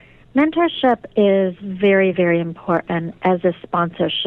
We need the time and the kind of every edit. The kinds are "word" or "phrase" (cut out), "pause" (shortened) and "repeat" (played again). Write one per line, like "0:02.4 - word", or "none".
none

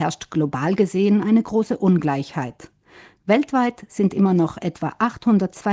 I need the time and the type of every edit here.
none

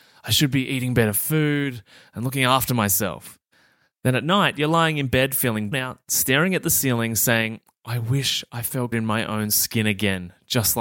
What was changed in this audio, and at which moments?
0:05.7 - word
0:08.9 - word

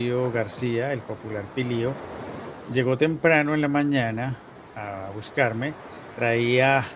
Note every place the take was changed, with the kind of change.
none

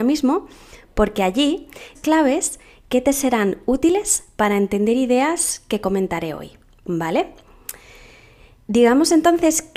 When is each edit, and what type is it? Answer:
0:01.9 - phrase

